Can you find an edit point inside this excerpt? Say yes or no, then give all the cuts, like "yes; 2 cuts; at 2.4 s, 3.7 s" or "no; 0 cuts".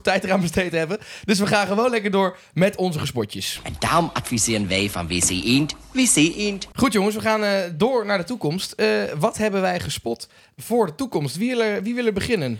no; 0 cuts